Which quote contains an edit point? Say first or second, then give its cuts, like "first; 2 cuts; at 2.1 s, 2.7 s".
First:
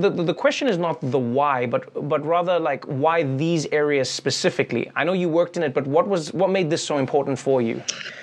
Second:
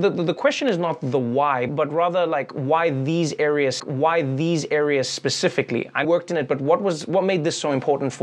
second; 3 cuts; at 1.7 s, 3.8 s, 6.0 s